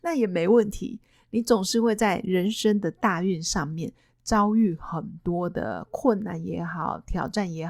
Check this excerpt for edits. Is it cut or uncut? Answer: uncut